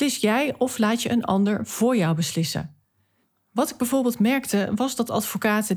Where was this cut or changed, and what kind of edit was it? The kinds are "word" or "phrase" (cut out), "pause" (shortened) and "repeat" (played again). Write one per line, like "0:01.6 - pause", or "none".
none